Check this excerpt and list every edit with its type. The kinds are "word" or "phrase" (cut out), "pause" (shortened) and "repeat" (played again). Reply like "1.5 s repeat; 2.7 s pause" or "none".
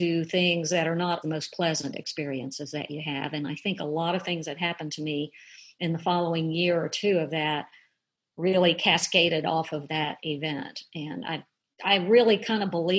1.2 s word